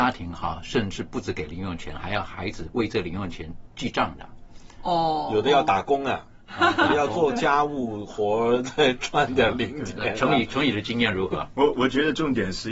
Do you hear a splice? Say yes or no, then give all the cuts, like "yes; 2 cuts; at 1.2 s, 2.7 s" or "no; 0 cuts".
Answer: no; 0 cuts